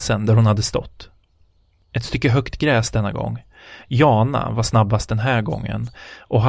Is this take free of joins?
yes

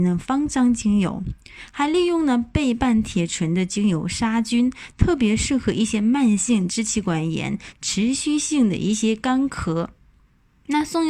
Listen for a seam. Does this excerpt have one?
no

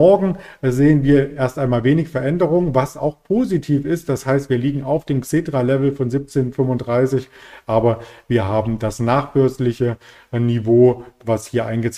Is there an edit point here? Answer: no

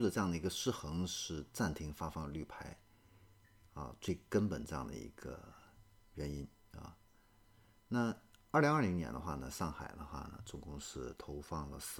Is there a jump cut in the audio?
no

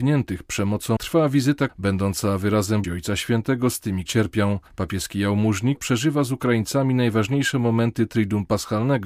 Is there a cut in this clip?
yes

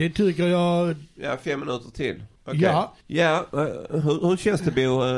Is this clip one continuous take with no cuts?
no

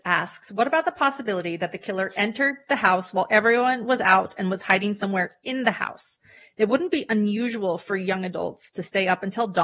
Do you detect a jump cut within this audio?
no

